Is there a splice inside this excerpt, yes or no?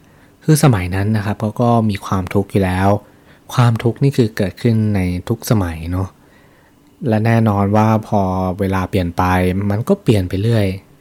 no